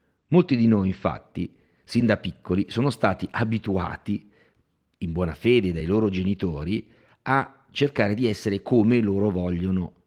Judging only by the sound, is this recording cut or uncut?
uncut